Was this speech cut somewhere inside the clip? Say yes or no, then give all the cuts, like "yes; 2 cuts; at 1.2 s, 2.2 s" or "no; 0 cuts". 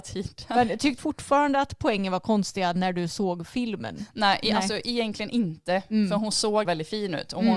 yes; 2 cuts; at 1.0 s, 6.6 s